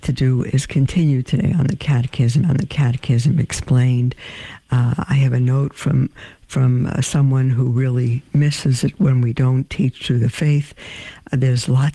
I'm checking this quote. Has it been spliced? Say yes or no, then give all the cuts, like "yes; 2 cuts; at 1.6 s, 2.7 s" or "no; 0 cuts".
yes; 1 cut; at 2.4 s